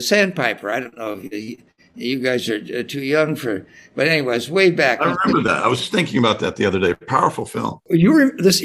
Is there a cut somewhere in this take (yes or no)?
no